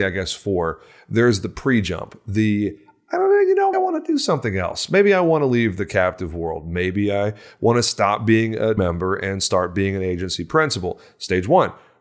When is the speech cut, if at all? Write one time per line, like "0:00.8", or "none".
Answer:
0:03.7
0:08.8